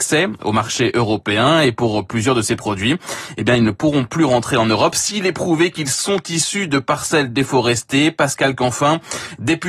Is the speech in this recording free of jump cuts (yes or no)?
yes